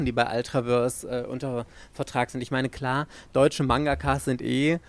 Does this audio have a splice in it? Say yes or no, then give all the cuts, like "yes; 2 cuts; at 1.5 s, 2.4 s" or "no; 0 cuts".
no; 0 cuts